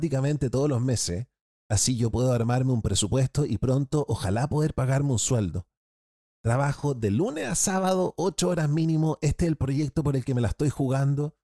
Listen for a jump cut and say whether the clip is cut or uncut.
uncut